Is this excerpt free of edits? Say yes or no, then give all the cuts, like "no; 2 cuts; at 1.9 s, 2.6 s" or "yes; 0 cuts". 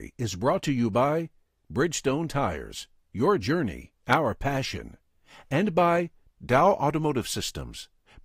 yes; 0 cuts